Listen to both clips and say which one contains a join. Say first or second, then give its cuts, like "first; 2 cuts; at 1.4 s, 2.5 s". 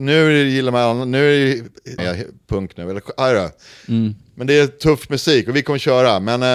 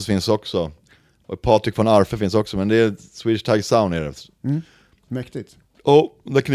first; 1 cut; at 2.0 s